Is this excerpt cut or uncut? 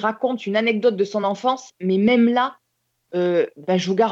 uncut